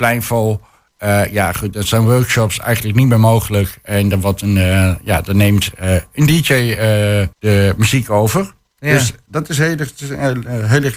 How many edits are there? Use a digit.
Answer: 1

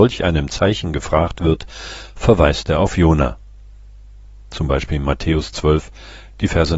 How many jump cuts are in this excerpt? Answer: 0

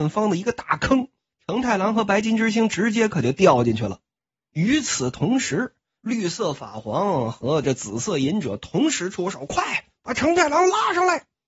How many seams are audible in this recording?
2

